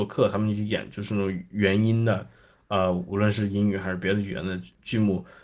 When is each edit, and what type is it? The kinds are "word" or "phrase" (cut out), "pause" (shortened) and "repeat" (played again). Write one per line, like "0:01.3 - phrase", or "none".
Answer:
none